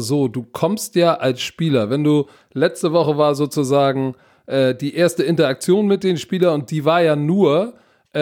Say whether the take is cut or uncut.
uncut